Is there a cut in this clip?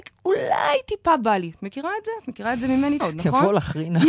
yes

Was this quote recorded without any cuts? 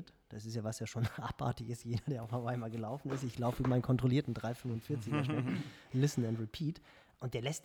yes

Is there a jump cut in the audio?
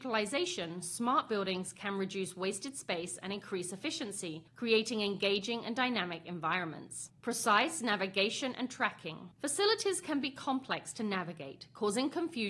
yes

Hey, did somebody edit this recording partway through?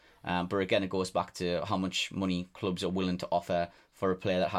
no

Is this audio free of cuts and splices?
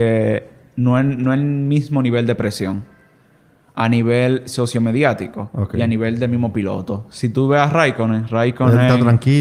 yes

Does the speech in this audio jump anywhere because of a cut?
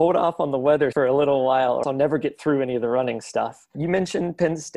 yes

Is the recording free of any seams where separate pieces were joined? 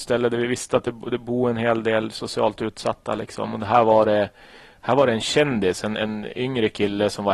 yes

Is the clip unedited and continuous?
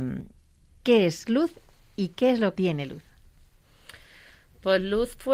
no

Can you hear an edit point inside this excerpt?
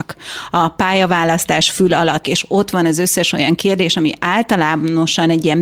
yes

